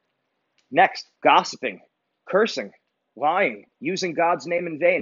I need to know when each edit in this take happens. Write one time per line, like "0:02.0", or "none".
0:01.2
0:03.7

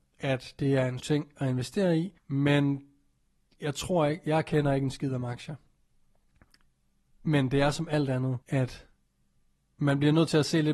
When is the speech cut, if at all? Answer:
0:01.0
0:02.2
0:08.4

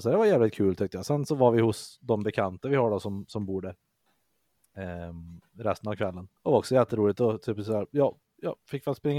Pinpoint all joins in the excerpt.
0:06.4

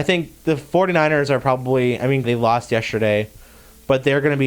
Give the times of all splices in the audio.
0:02.2

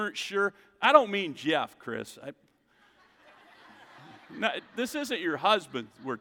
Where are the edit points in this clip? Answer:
none

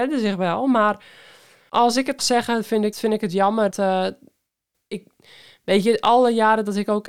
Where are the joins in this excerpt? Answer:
0:01.7
0:02.2
0:02.9
0:03.7

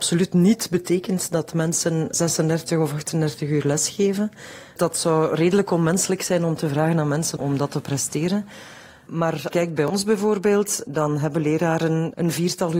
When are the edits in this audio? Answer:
0:07.4
0:09.5

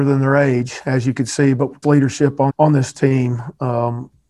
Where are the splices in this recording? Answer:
0:01.8
0:02.5

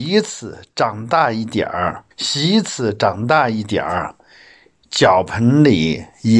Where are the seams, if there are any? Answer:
0:02.1

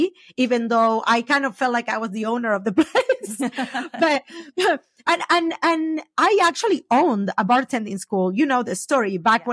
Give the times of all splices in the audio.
none

